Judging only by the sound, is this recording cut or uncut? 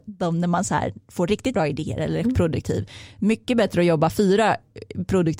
cut